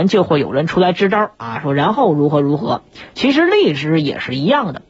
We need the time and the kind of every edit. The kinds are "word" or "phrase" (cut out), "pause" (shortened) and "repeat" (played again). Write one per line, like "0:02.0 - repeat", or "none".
none